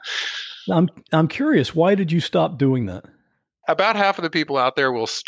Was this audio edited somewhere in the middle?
no; 0 cuts

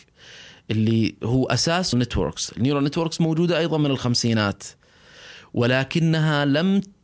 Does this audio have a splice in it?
yes; 1 cut; at 1.9 s

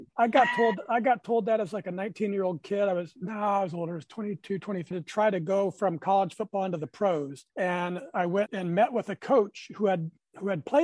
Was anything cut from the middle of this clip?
yes; 3 cuts; at 4.9 s, 7.5 s, 8.5 s

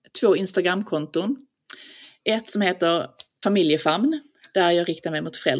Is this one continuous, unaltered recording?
yes; 0 cuts

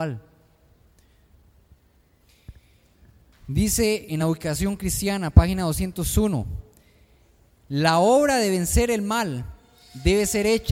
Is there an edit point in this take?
no; 0 cuts

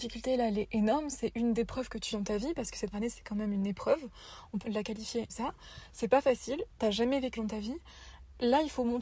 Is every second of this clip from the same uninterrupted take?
no; 6 cuts; at 1.6 s, 2.1 s, 2.9 s, 4.6 s, 5.3 s, 7.4 s

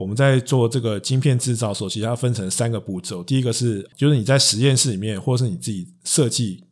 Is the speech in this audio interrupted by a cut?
yes; 1 cut; at 3.9 s

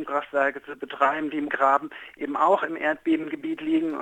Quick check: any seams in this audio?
yes; 1 cut; at 1.5 s

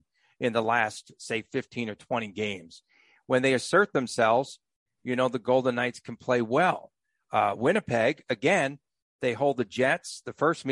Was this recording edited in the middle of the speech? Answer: no; 0 cuts

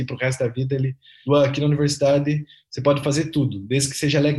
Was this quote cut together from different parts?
no; 0 cuts

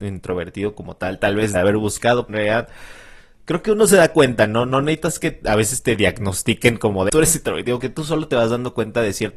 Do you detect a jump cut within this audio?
yes; 4 cuts; at 1.5 s, 2.3 s, 7.1 s, 7.8 s

